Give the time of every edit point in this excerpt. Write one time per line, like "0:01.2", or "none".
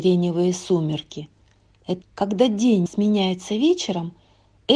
0:02.0
0:02.9